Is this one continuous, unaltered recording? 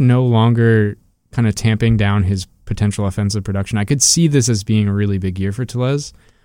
yes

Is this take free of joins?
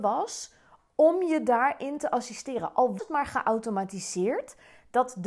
no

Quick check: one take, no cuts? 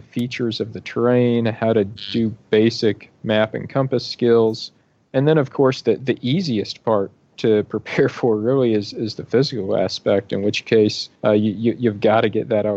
no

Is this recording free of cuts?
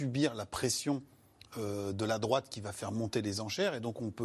yes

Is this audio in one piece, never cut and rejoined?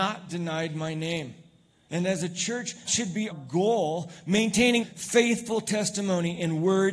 no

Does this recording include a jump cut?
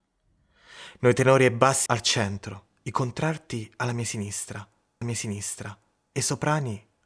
yes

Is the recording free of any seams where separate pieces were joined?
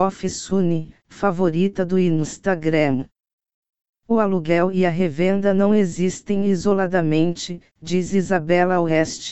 yes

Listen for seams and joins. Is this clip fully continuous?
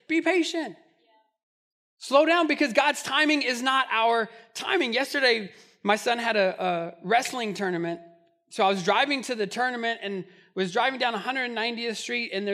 yes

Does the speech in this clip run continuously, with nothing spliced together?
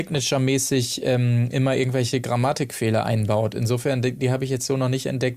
yes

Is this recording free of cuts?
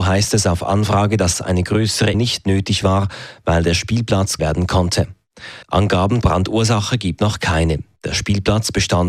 no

